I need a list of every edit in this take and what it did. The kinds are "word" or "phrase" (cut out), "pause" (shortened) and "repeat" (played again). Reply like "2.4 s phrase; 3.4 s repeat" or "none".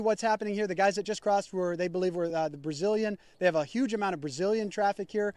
none